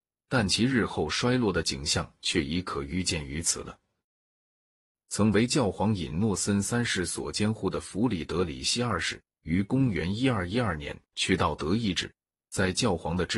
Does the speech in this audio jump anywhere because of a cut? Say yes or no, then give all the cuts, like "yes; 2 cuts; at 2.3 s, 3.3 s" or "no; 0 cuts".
no; 0 cuts